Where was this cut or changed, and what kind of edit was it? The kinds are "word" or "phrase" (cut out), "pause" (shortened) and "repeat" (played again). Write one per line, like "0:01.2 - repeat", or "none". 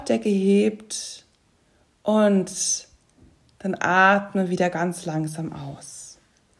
none